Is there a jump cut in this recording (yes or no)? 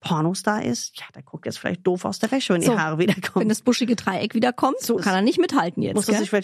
yes